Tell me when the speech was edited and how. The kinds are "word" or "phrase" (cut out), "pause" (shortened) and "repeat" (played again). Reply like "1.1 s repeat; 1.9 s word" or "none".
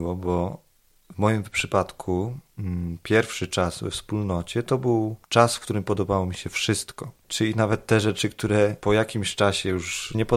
2.5 s pause; 7.2 s pause